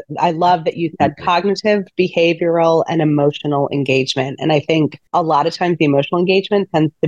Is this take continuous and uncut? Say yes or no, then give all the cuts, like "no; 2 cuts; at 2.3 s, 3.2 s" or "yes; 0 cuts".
no; 1 cut; at 5.1 s